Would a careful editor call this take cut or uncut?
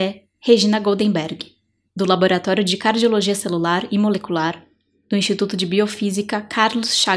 uncut